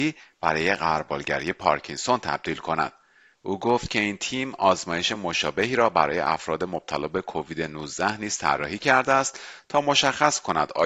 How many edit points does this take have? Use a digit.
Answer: 0